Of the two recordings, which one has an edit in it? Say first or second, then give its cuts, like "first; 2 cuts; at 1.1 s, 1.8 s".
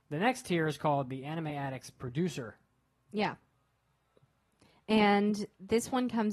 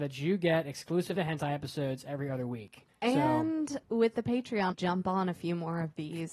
second; 4 cuts; at 1.2 s, 2.9 s, 3.8 s, 4.7 s